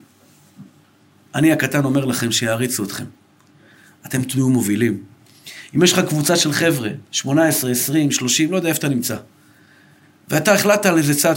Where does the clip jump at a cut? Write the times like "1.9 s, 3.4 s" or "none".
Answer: none